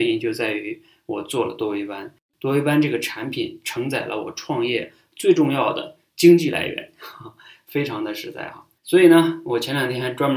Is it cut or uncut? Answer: cut